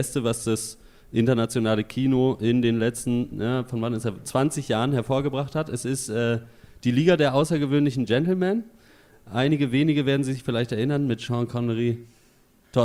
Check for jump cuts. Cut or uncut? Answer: uncut